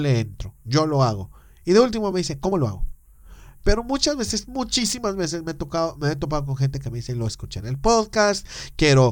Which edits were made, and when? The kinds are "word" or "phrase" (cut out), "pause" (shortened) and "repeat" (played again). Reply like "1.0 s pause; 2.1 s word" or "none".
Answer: none